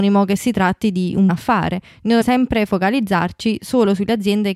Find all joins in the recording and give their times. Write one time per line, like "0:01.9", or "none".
0:01.3
0:02.2